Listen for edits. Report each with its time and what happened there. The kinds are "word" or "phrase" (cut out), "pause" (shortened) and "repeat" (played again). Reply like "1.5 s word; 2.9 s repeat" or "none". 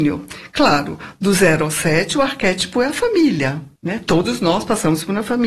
3.8 s pause